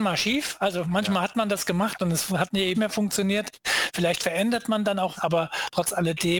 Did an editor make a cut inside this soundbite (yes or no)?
yes